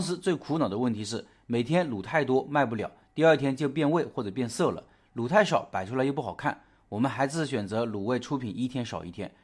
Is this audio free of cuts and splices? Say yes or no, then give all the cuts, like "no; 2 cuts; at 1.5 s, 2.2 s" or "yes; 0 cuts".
yes; 0 cuts